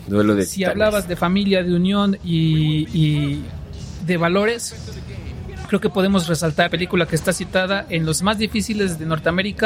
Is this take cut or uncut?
cut